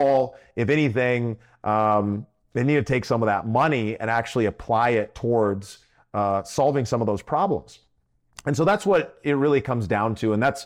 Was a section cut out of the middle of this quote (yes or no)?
no